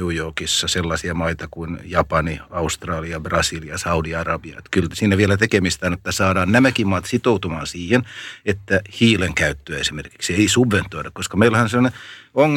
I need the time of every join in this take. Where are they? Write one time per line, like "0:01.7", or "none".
none